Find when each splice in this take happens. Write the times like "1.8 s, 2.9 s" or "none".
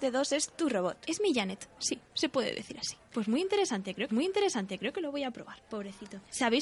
4.1 s

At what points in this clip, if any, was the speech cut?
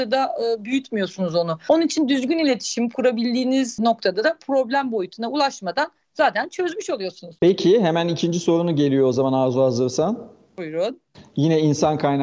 none

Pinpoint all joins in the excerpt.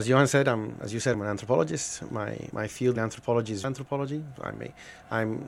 1.1 s, 2.5 s, 3.0 s, 3.6 s

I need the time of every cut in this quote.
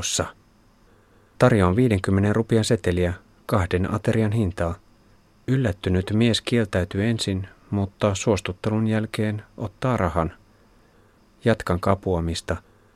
none

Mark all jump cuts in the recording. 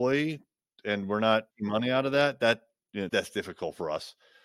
1.5 s, 3.1 s

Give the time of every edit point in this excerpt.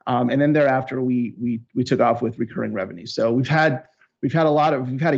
none

